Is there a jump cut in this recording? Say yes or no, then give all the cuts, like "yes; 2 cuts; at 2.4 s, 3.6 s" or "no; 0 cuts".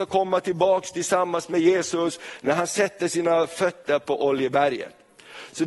no; 0 cuts